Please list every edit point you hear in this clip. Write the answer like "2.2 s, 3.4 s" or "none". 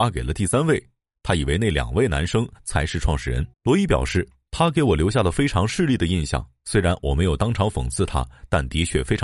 3.5 s